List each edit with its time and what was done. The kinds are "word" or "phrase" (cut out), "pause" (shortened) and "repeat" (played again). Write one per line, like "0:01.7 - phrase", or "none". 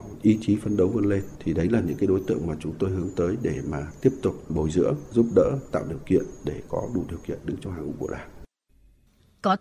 none